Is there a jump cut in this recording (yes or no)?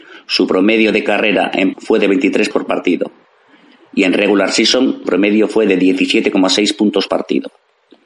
yes